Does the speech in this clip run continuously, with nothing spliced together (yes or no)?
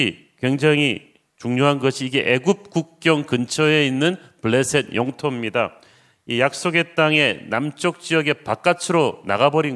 yes